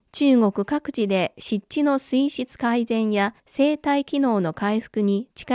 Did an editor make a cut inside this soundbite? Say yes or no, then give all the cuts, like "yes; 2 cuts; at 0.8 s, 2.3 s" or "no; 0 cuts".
yes; 1 cut; at 3.4 s